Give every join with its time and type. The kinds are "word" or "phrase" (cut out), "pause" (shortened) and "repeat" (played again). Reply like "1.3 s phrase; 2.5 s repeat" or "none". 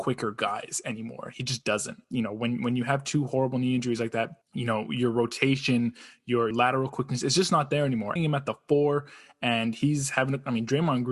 2.0 s pause; 4.4 s pause; 6.5 s word; 8.2 s phrase